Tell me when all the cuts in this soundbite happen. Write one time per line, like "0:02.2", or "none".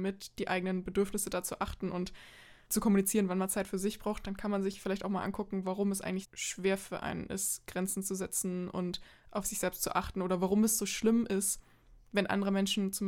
0:06.2